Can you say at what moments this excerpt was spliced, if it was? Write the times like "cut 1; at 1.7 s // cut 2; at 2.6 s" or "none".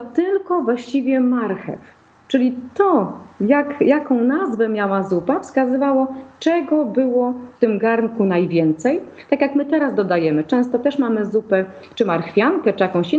cut 1; at 7.6 s